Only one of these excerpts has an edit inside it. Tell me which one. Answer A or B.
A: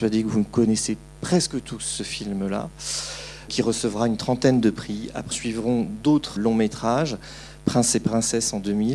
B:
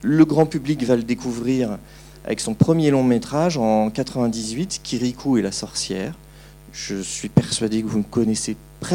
A